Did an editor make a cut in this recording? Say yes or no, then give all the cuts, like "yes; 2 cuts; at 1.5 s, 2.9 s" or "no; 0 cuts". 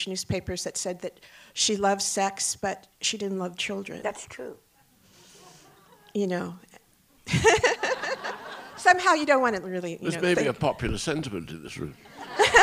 no; 0 cuts